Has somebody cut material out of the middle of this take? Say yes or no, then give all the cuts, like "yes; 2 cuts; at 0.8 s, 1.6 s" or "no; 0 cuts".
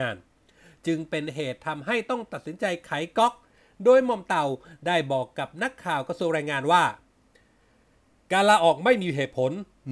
no; 0 cuts